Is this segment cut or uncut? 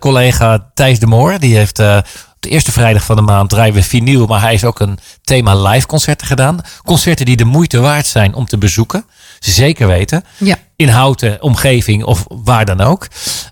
uncut